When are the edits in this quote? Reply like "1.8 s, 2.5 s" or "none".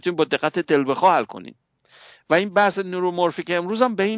none